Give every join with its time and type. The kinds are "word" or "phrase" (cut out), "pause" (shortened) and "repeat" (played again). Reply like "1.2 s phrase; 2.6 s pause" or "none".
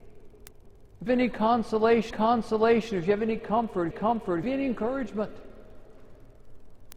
1.1 s word; 2.1 s repeat; 3.9 s repeat; 4.4 s word